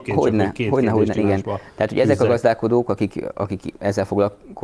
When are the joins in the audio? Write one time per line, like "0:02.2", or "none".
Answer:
0:01.2